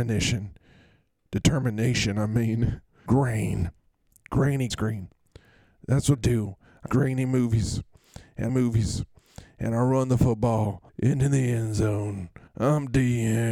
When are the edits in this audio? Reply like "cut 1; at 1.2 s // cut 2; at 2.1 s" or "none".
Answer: cut 1; at 3.1 s // cut 2; at 4.7 s // cut 3; at 6.1 s // cut 4; at 6.9 s // cut 5; at 8.5 s // cut 6; at 10.9 s // cut 7; at 12.5 s